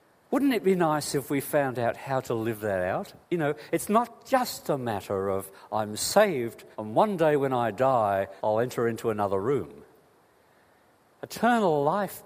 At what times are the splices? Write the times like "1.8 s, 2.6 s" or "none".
3.2 s, 6.7 s, 8.4 s